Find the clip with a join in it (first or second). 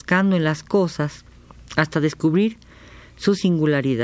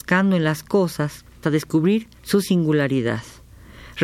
second